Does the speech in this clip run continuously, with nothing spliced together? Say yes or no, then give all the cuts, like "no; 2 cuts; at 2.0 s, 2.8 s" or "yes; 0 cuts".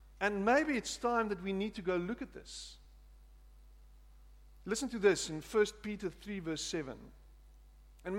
yes; 0 cuts